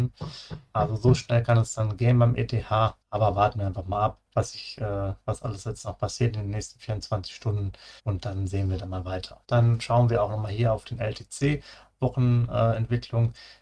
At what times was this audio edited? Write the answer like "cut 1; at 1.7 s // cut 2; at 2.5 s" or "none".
cut 1; at 3.0 s // cut 2; at 4.3 s // cut 3; at 8.0 s // cut 4; at 9.4 s